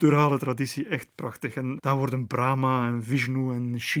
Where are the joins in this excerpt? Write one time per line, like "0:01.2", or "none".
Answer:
0:01.8